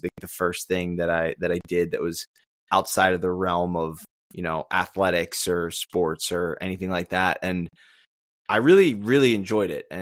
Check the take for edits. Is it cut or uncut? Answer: uncut